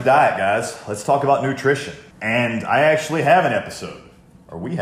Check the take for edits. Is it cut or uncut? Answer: cut